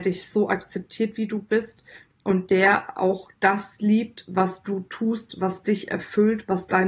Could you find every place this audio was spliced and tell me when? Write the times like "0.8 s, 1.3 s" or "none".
none